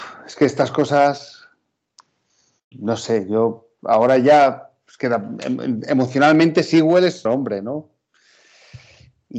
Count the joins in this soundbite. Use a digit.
2